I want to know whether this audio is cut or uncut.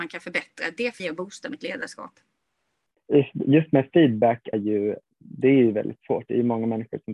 cut